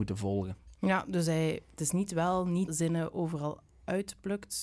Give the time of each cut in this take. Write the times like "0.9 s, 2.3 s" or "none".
1.6 s, 2.7 s

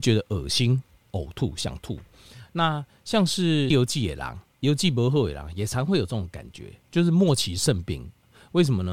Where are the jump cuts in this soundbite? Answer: 1.0 s, 3.7 s, 4.5 s

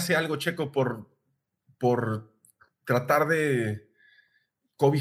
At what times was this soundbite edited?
none

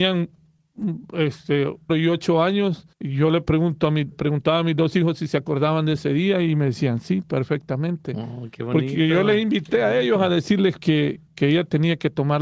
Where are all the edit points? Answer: 1.9 s, 2.9 s, 4.1 s, 11.3 s

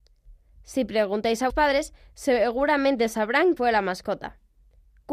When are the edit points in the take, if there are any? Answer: 1.5 s, 3.6 s

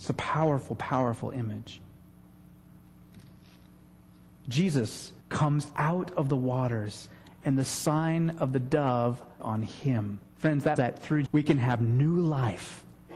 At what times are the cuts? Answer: 5.2 s, 9.4 s, 10.3 s, 10.8 s, 11.3 s

